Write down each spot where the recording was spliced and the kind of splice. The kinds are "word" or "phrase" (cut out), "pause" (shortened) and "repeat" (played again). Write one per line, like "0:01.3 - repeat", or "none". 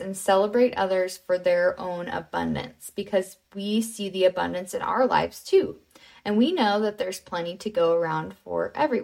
none